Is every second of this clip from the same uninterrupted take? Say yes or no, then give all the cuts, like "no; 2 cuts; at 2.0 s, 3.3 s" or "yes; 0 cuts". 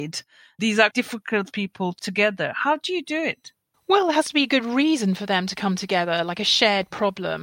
no; 3 cuts; at 0.9 s, 2.0 s, 3.7 s